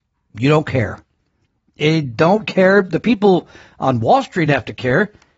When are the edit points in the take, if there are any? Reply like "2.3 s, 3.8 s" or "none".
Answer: none

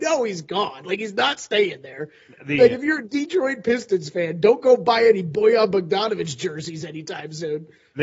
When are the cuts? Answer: none

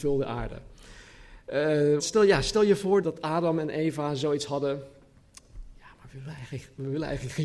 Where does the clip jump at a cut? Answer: 2.0 s, 3.0 s

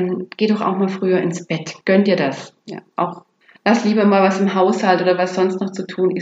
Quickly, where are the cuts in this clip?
1.8 s, 3.4 s

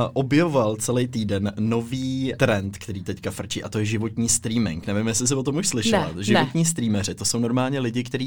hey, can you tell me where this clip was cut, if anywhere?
2.4 s

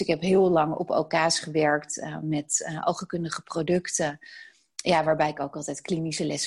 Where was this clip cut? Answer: none

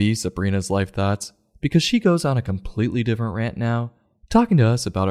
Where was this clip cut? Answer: none

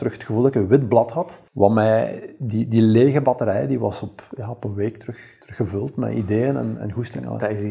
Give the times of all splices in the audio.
1.5 s, 5.4 s

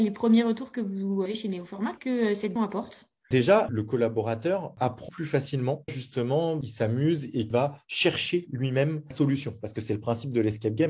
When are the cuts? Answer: 1.3 s, 2.0 s, 2.6 s, 3.7 s, 5.1 s, 5.9 s, 7.5 s, 9.1 s

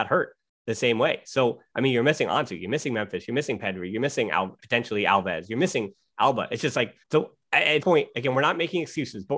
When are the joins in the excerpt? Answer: 4.6 s, 7.0 s, 7.8 s

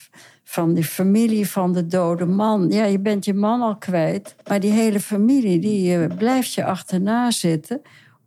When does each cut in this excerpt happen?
4.4 s

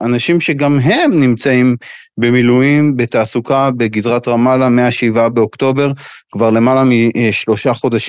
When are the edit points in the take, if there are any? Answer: none

